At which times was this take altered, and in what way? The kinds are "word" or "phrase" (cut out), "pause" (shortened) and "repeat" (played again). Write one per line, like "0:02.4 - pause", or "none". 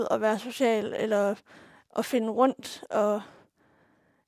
none